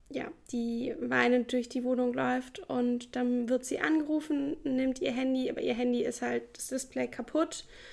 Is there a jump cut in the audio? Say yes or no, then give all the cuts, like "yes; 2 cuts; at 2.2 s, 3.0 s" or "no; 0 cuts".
no; 0 cuts